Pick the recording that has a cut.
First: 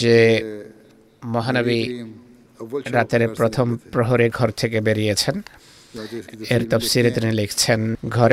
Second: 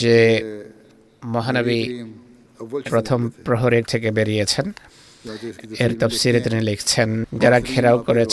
second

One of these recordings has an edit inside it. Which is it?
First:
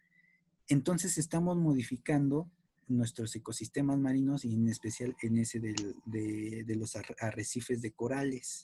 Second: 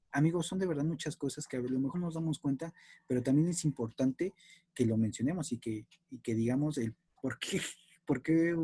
second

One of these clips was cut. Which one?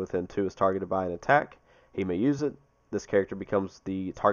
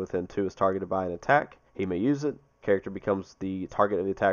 second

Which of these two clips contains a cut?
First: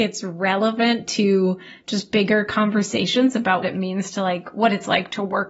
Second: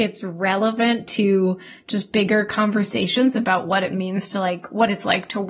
first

